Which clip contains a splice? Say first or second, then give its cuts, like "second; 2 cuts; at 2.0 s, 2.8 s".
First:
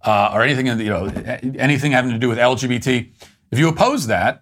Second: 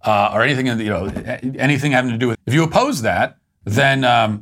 second; 1 cut; at 2.3 s